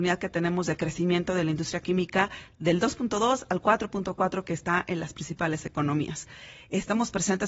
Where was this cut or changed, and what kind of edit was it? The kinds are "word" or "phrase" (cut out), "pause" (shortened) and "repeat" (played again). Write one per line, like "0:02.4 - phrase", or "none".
none